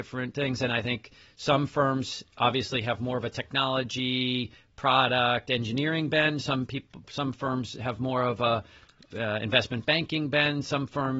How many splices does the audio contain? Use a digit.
0